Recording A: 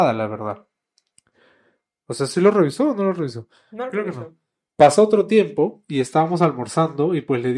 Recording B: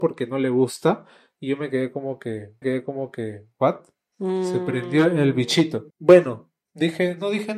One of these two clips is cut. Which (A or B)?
B